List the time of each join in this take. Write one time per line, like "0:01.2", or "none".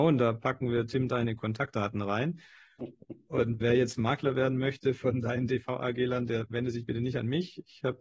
0:03.6

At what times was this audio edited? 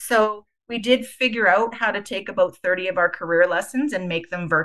none

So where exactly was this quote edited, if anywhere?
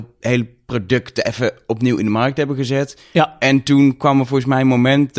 none

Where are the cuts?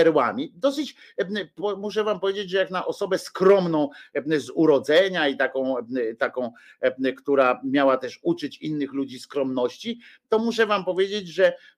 none

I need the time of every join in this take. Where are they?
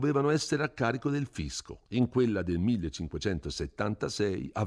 0:01.9

